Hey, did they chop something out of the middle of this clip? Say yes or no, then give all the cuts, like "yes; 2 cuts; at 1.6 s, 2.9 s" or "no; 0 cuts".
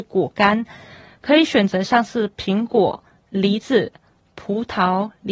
no; 0 cuts